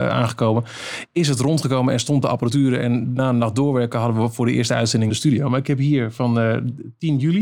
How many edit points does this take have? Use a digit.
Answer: 1